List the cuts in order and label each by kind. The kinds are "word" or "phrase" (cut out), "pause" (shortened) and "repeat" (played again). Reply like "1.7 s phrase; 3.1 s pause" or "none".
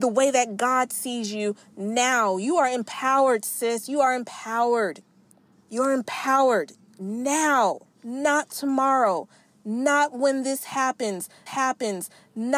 7.9 s pause; 11.5 s repeat